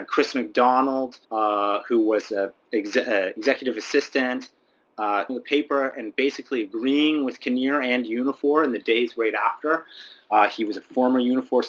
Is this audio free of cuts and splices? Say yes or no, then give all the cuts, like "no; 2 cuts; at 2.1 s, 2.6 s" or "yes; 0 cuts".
no; 2 cuts; at 1.2 s, 5.3 s